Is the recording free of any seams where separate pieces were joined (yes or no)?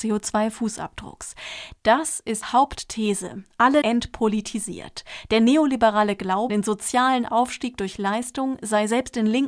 no